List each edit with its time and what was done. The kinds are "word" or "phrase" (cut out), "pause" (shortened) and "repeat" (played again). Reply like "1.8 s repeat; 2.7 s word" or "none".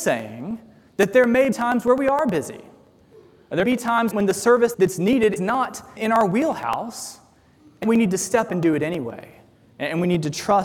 1.5 s word; 3.6 s word; 4.1 s word; 4.7 s word; 5.4 s word; 6.0 s word; 7.8 s word; 8.5 s word